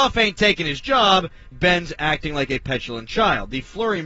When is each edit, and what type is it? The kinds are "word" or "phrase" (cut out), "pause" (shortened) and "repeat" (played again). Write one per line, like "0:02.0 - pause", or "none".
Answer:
0:01.5 - word